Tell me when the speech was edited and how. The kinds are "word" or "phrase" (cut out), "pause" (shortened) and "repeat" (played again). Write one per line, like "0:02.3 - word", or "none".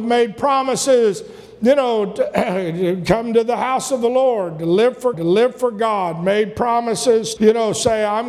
0:05.1 - repeat
0:07.4 - word